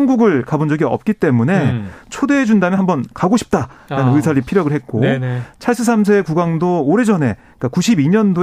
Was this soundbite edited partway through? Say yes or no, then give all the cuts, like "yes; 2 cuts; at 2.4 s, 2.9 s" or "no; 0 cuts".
no; 0 cuts